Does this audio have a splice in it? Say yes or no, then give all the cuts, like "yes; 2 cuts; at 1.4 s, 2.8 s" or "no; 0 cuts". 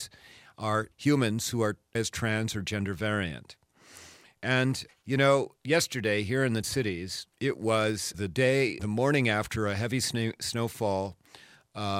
yes; 8 cuts; at 0.9 s, 1.9 s, 4.9 s, 5.6 s, 6.6 s, 7.3 s, 8.1 s, 8.8 s